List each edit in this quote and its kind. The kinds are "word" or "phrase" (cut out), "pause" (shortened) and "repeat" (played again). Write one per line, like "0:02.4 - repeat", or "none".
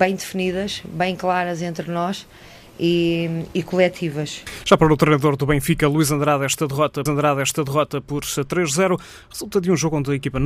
0:07.1 - repeat